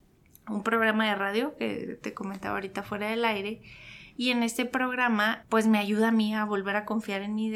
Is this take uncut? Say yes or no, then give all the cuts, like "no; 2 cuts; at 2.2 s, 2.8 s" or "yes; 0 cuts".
yes; 0 cuts